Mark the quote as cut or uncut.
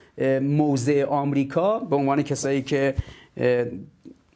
uncut